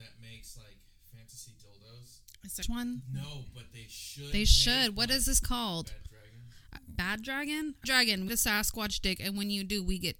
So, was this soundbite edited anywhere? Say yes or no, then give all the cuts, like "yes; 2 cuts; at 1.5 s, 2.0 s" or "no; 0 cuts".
yes; 4 cuts; at 2.6 s, 5.4 s, 7.8 s, 8.3 s